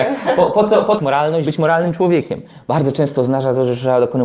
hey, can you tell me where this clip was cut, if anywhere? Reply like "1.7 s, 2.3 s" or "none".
1.0 s, 1.5 s